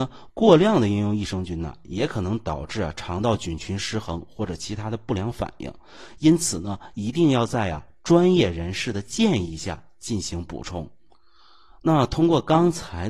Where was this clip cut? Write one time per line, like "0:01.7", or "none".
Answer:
0:11.1

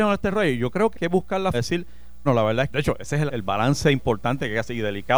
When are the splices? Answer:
0:00.9
0:01.5
0:02.3
0:02.7
0:03.3

